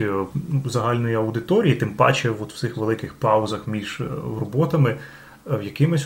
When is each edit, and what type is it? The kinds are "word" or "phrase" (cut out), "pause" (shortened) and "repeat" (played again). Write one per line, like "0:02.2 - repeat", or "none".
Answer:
none